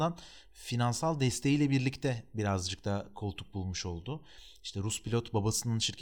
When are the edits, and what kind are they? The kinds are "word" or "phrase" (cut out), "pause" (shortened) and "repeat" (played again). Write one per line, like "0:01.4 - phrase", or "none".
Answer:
none